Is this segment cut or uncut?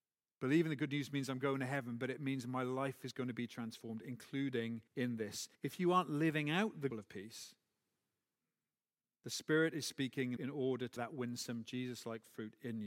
cut